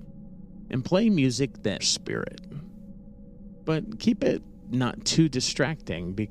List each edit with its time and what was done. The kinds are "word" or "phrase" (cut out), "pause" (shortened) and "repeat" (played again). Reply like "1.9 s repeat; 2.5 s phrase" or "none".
1.8 s phrase